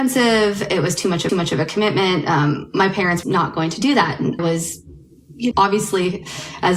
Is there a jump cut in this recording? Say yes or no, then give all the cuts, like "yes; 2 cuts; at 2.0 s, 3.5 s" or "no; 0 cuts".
yes; 4 cuts; at 1.3 s, 3.2 s, 4.4 s, 5.5 s